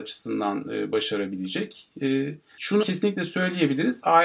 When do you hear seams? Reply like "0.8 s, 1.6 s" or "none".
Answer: 2.8 s